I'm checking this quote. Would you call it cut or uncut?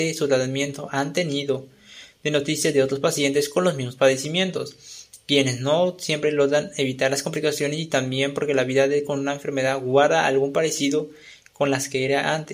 uncut